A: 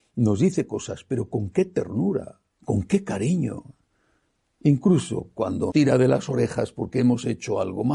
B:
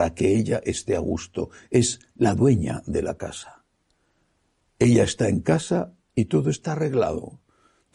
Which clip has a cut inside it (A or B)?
A